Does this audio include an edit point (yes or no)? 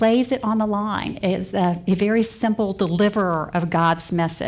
no